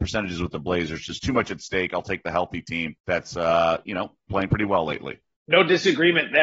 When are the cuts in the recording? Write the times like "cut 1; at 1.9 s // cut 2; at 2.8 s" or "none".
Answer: cut 1; at 3.0 s // cut 2; at 4.2 s // cut 3; at 5.3 s

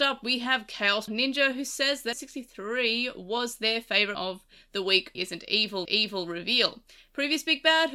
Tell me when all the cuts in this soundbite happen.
cut 1; at 1.1 s // cut 2; at 2.1 s // cut 3; at 4.1 s // cut 4; at 5.2 s // cut 5; at 5.9 s

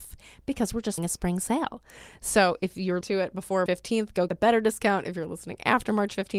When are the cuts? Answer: cut 1; at 1.0 s // cut 2; at 3.0 s // cut 3; at 3.7 s // cut 4; at 4.3 s

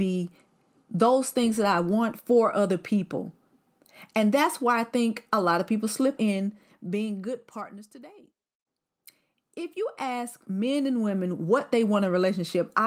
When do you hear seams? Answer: cut 1; at 6.2 s

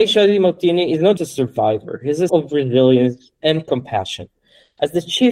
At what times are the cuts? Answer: cut 1; at 1.2 s // cut 2; at 2.3 s

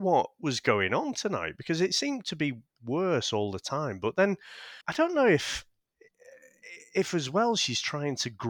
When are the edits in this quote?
cut 1; at 4.8 s

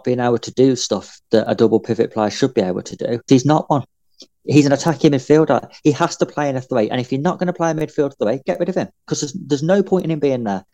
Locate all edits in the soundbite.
cut 1; at 3.3 s

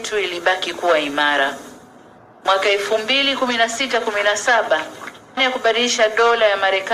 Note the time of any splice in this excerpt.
cut 1; at 5.4 s

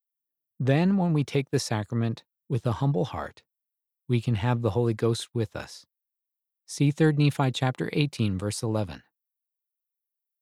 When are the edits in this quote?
none

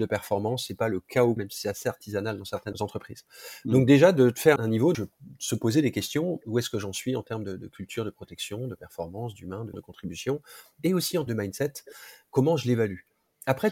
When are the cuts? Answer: cut 1; at 1.4 s // cut 2; at 2.7 s // cut 3; at 4.6 s // cut 4; at 4.9 s // cut 5; at 9.7 s // cut 6; at 11.3 s

